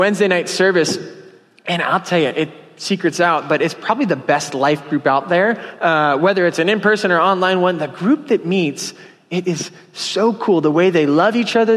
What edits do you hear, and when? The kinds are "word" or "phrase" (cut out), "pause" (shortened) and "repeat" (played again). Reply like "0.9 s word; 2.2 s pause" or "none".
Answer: none